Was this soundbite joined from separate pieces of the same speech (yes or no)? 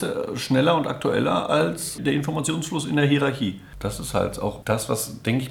no